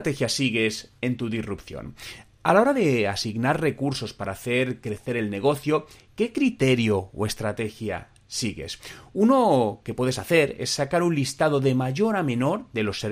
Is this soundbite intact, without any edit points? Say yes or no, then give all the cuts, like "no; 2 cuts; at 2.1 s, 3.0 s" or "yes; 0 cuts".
yes; 0 cuts